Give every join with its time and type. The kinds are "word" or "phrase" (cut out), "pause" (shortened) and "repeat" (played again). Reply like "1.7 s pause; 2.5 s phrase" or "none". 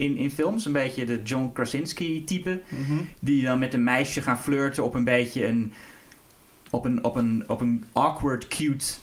none